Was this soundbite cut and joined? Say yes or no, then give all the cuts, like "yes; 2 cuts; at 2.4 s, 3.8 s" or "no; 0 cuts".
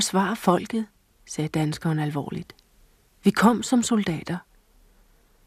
no; 0 cuts